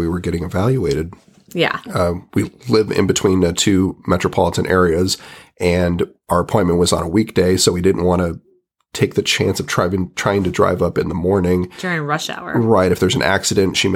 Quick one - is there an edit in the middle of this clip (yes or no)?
no